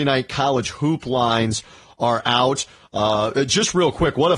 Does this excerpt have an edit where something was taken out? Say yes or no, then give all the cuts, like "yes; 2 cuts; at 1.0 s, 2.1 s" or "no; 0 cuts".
no; 0 cuts